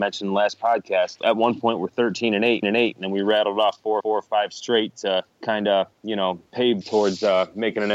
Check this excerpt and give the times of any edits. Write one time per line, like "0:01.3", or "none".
0:01.2
0:02.6
0:04.0
0:05.3
0:05.9
0:06.5
0:06.8